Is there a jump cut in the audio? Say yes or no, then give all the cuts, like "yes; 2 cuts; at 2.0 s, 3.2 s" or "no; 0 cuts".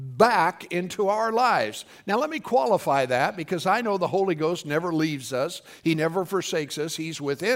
no; 0 cuts